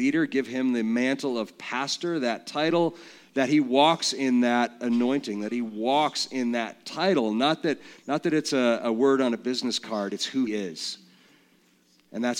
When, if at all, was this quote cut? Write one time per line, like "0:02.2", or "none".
0:10.5